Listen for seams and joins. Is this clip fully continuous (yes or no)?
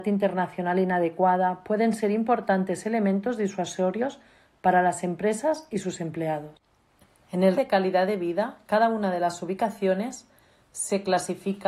no